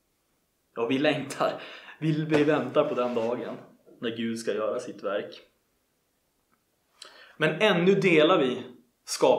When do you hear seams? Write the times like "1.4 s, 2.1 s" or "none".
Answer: none

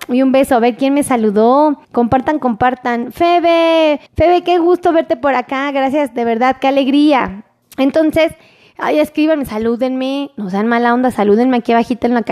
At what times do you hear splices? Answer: 1.8 s, 4.1 s, 7.6 s

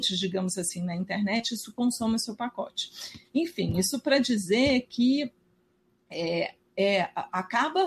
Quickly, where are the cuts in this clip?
none

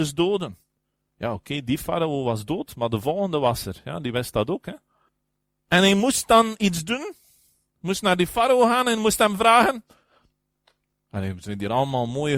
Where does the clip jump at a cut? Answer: none

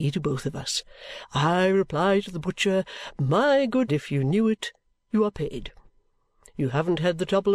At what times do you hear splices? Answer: 3.9 s

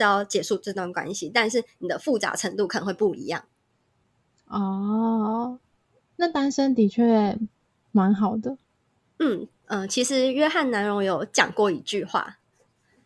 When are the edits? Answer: none

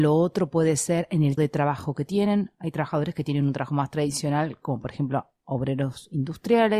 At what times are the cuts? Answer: 1.4 s

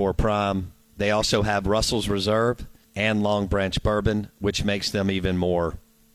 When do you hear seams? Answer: 2.8 s

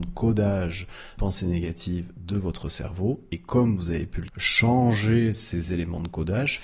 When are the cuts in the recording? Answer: 1.2 s, 4.3 s

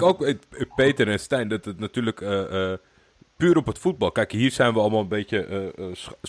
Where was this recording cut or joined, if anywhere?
none

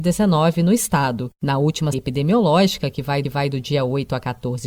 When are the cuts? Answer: 1.9 s, 3.2 s

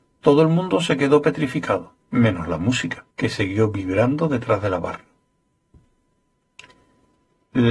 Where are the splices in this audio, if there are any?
2.0 s, 3.1 s

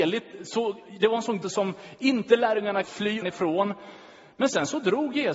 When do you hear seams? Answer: 1.4 s, 2.8 s, 3.2 s

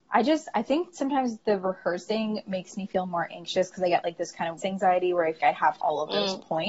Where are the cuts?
4.6 s, 5.4 s, 5.8 s

